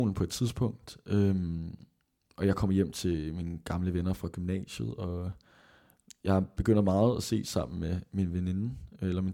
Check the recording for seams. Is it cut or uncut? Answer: uncut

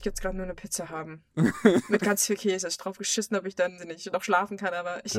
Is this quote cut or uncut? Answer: cut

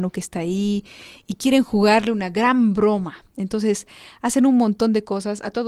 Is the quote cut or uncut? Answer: uncut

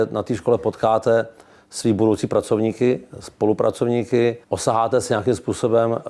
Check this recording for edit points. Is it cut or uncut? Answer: cut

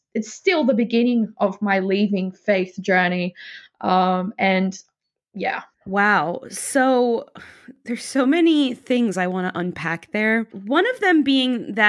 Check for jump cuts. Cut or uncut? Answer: uncut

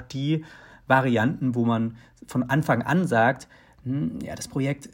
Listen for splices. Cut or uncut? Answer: uncut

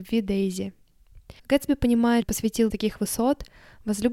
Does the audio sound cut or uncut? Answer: cut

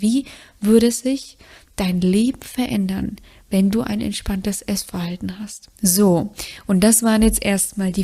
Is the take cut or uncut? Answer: uncut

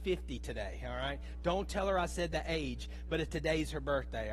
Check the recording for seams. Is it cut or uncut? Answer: uncut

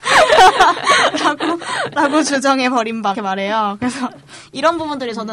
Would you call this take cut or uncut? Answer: cut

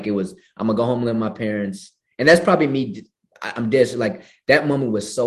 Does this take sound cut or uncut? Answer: uncut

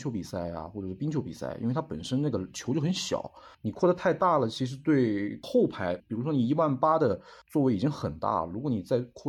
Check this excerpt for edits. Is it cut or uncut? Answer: cut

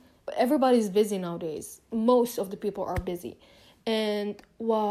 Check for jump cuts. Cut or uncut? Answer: uncut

